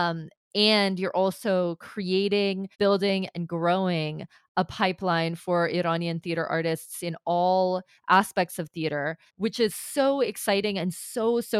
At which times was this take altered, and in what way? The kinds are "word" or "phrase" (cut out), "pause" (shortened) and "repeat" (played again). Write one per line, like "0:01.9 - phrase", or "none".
0:02.7 - pause
0:09.3 - pause

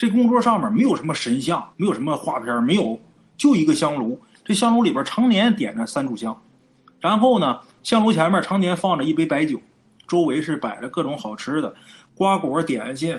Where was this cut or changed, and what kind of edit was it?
0:01.7 - pause

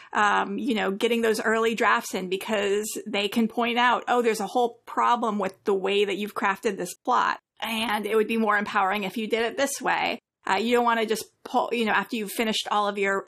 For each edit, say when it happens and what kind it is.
none

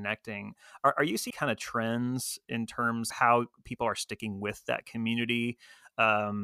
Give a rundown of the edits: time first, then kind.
0:01.3 - word
0:03.1 - word

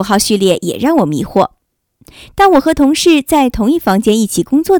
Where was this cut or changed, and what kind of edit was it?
none

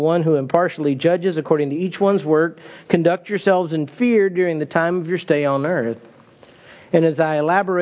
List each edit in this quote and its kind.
none

